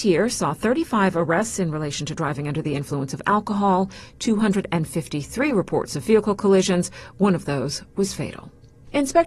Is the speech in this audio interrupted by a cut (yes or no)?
no